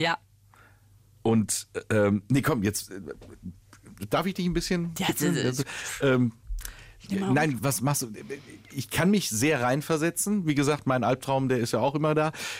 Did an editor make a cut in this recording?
yes; 1 cut; at 7.6 s

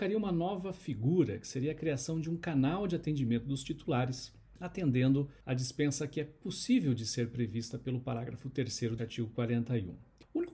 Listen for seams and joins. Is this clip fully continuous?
no; 1 cut; at 9.0 s

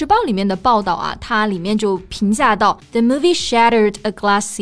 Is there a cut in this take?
no; 0 cuts

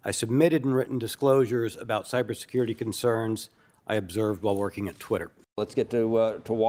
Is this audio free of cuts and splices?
yes; 0 cuts

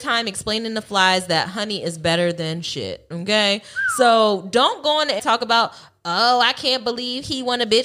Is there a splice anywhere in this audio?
yes; 1 cut; at 5.2 s

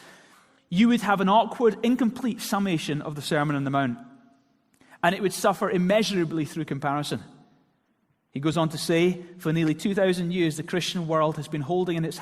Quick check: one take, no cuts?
yes; 0 cuts

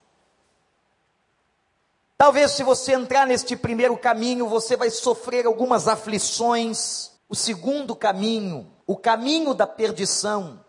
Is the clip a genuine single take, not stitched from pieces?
no; 2 cuts; at 7.2 s, 8.8 s

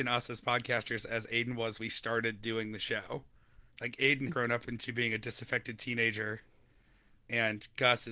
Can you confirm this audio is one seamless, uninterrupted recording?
no; 3 cuts; at 1.8 s, 3.7 s, 4.3 s

